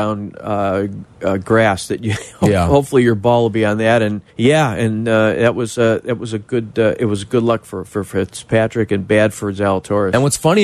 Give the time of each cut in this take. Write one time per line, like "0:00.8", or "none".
0:04.3